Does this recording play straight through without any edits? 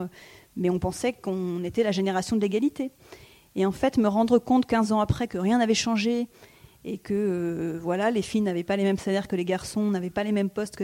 yes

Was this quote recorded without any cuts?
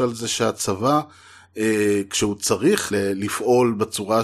no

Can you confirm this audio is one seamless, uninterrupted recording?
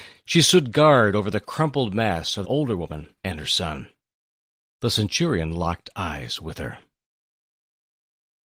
no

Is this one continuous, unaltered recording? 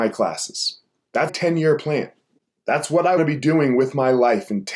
no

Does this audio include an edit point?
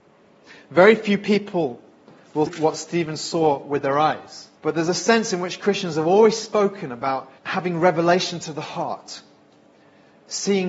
yes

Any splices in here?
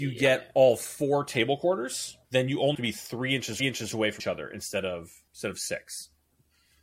yes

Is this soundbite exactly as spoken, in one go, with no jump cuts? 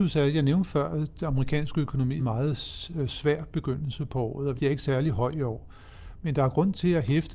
no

